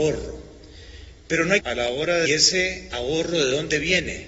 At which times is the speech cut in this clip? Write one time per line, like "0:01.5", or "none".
0:01.6
0:02.3